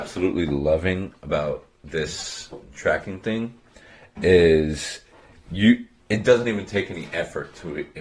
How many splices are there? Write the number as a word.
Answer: zero